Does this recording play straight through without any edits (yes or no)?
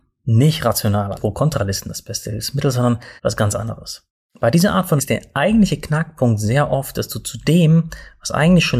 no